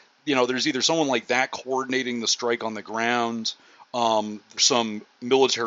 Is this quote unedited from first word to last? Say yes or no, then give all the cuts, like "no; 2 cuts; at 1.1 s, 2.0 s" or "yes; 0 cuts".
no; 1 cut; at 4.6 s